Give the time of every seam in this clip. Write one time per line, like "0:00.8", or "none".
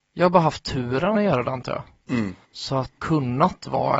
0:01.1
0:02.4
0:03.0